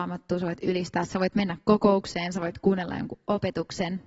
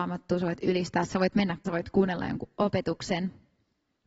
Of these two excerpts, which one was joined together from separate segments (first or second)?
second